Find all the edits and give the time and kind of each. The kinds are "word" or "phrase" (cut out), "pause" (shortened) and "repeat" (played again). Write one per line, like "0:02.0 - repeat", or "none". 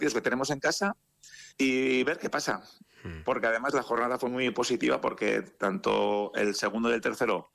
0:01.5 - pause